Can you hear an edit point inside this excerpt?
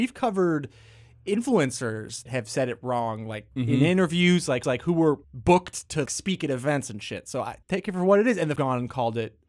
yes; 7 cuts; at 2.3 s, 3.5 s, 4.6 s, 5.2 s, 6.1 s, 7.6 s, 8.6 s

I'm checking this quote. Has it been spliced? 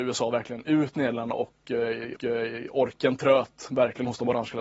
yes; 1 cut; at 2.2 s

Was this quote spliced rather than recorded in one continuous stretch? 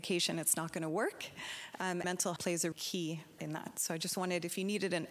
yes; 4 cuts; at 2.0 s, 2.4 s, 2.7 s, 3.4 s

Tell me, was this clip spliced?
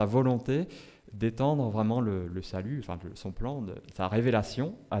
no; 0 cuts

